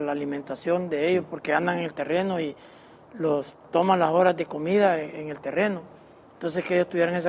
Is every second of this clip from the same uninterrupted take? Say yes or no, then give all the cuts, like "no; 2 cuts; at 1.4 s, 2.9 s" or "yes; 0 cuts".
yes; 0 cuts